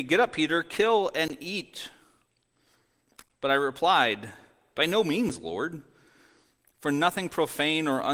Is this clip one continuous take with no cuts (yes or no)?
yes